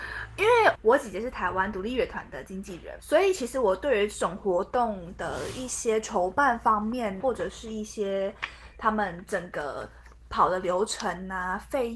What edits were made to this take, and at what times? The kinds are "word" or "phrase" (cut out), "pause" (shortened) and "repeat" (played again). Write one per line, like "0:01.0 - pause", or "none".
0:03.0 - word
0:07.2 - word